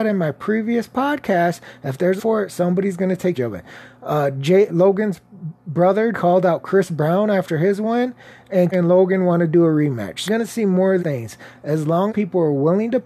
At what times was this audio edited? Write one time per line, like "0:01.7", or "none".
0:02.2
0:03.4
0:04.7
0:06.1
0:08.7
0:10.3
0:11.0
0:12.1